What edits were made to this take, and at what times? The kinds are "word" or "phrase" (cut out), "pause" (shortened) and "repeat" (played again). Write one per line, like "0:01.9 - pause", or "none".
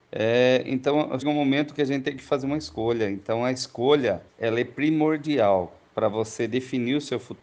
0:01.2 - word
0:04.3 - pause
0:05.8 - pause